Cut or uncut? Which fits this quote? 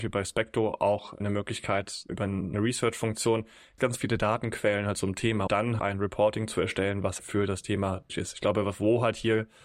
cut